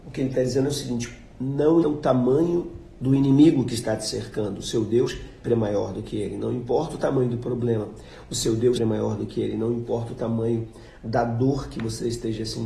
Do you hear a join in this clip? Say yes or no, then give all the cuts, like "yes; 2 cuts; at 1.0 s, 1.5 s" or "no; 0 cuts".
yes; 3 cuts; at 1.8 s, 5.4 s, 8.8 s